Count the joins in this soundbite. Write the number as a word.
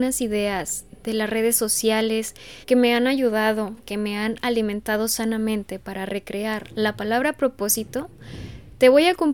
one